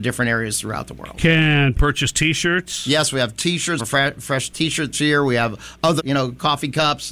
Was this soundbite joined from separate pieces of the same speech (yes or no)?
yes